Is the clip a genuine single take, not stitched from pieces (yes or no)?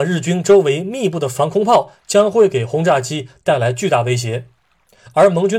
yes